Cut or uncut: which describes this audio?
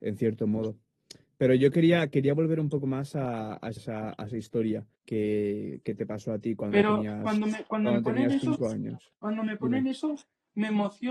cut